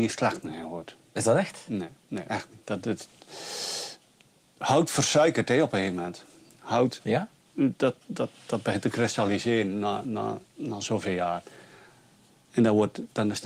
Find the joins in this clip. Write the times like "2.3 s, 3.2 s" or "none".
2.0 s, 2.6 s, 10.5 s